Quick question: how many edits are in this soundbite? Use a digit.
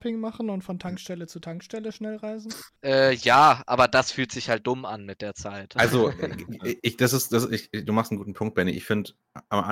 0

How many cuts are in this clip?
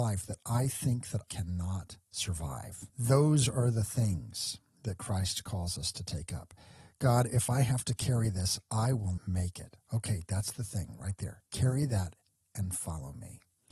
4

